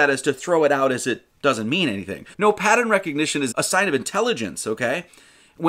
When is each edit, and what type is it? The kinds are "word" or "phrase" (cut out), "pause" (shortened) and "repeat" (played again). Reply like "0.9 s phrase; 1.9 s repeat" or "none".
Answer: 2.3 s pause; 3.5 s word

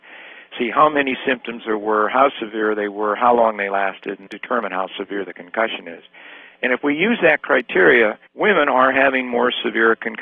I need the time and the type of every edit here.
4.3 s word; 8.3 s pause

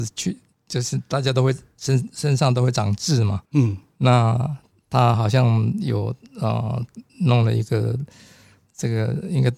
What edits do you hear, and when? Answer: 3.4 s pause; 7.1 s pause

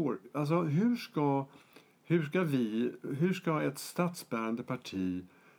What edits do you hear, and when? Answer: none

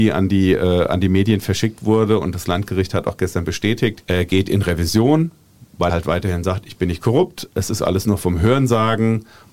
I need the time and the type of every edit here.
5.9 s word

